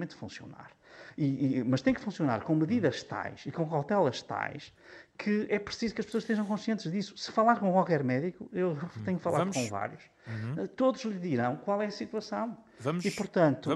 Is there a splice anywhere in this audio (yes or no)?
no